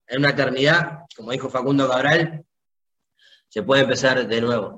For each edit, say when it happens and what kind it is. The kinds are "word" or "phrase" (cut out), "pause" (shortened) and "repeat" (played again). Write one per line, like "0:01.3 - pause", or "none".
none